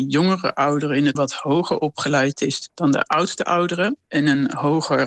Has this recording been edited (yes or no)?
yes